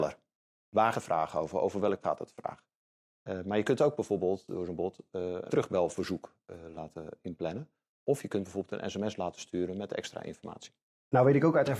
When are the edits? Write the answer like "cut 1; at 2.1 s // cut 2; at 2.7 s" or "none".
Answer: cut 1; at 0.9 s // cut 2; at 2.0 s // cut 3; at 5.5 s // cut 4; at 6.7 s